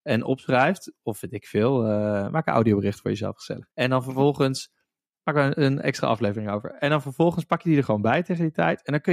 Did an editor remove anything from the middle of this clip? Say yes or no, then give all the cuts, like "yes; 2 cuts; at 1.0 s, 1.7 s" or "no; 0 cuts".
yes; 1 cut; at 3.7 s